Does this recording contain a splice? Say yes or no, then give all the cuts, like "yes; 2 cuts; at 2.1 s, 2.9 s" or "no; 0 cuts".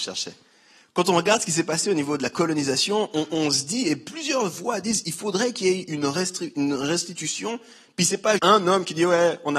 yes; 1 cut; at 8.4 s